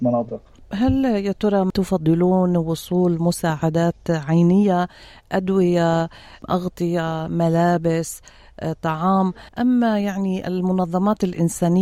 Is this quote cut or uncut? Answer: cut